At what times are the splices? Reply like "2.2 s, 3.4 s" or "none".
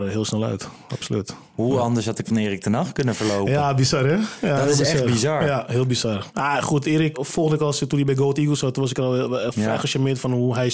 2.2 s, 7.1 s